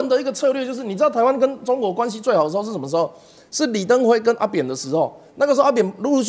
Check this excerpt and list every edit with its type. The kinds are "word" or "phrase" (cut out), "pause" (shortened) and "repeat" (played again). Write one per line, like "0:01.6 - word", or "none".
none